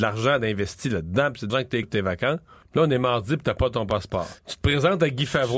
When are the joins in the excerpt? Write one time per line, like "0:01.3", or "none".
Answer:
0:01.5
0:01.8
0:02.6
0:04.4